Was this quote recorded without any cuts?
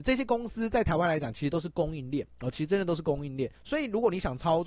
no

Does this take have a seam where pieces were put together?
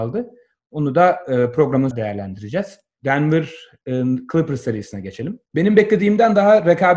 yes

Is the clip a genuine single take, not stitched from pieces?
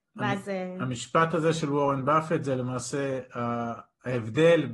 yes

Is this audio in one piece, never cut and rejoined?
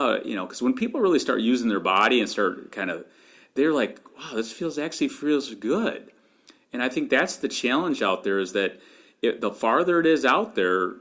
yes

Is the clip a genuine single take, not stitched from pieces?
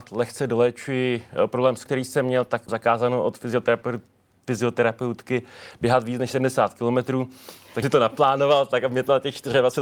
no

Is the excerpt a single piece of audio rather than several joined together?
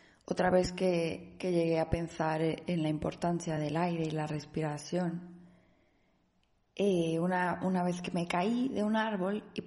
yes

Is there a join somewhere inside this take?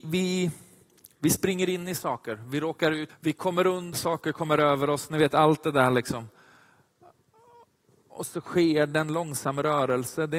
yes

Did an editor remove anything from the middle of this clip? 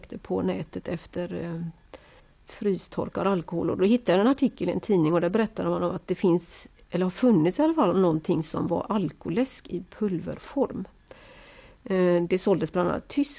yes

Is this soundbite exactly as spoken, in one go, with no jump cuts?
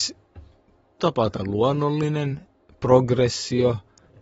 no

